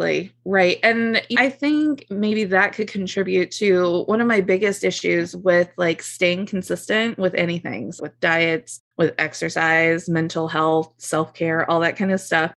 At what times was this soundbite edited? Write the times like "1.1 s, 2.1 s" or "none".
1.3 s, 8.0 s, 8.9 s